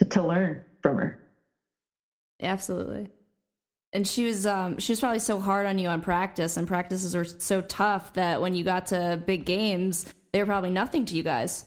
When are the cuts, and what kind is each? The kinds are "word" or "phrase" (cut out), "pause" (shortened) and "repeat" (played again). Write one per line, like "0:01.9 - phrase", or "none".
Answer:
none